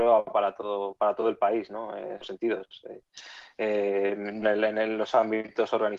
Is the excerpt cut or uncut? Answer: cut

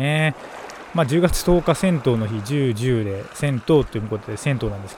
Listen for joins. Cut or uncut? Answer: uncut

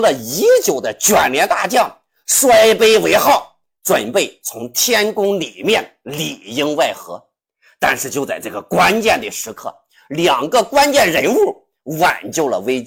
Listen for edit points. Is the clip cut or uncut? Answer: uncut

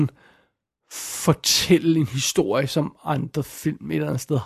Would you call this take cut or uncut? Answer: uncut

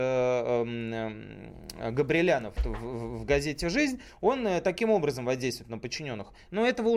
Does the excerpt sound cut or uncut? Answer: cut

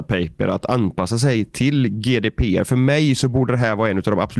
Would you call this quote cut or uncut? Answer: uncut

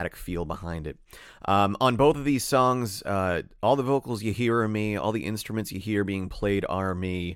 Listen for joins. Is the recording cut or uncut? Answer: uncut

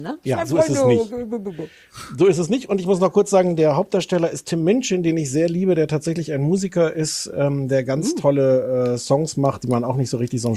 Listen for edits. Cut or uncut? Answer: uncut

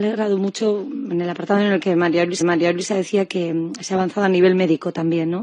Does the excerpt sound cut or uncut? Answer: cut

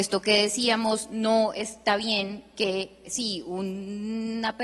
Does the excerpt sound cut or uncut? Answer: uncut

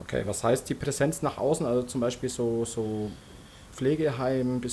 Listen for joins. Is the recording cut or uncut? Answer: uncut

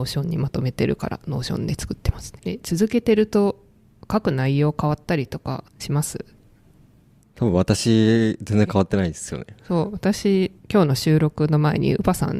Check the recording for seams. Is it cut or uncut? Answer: cut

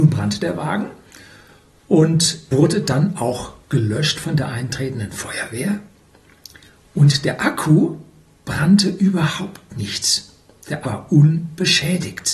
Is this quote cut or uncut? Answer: cut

